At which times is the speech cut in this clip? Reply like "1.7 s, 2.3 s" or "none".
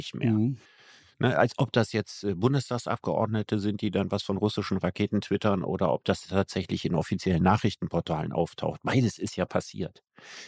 none